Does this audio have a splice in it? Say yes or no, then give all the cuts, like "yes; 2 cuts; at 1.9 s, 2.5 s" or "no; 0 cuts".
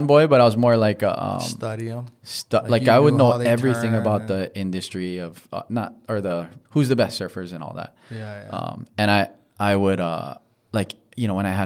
yes; 1 cut; at 6.6 s